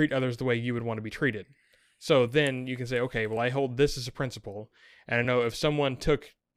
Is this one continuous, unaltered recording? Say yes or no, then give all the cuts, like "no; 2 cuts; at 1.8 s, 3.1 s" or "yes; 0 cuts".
yes; 0 cuts